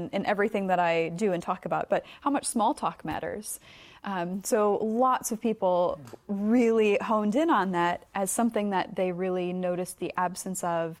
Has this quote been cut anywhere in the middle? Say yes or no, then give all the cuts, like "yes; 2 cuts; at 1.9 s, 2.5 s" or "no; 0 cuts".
yes; 1 cut; at 8.1 s